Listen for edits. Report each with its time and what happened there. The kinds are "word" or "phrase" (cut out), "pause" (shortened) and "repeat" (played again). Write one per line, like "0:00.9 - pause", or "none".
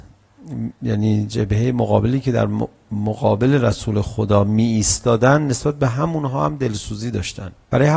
none